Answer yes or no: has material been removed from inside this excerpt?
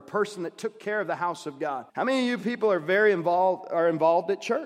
yes